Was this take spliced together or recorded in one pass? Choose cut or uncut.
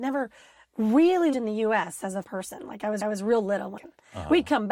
cut